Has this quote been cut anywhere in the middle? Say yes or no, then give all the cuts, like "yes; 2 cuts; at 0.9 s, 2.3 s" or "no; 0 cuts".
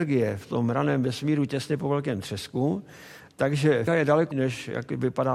yes; 2 cuts; at 3.9 s, 4.3 s